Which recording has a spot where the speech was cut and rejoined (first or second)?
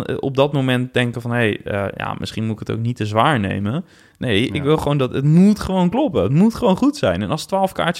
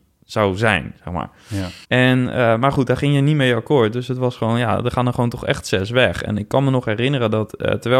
second